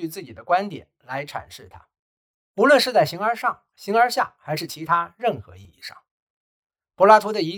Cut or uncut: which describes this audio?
uncut